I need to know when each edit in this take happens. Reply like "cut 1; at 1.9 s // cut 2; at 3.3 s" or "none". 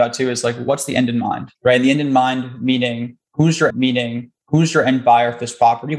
cut 1; at 1.6 s // cut 2; at 3.7 s